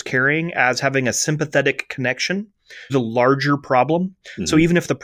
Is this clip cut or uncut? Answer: cut